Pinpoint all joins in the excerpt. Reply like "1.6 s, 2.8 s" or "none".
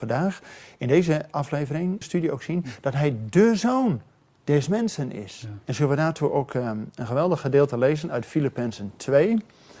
2.0 s, 5.6 s